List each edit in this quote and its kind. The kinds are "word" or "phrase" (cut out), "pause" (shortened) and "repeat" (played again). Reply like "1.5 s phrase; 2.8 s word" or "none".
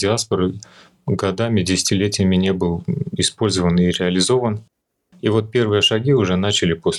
none